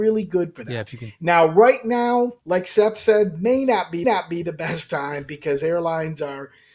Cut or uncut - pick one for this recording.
cut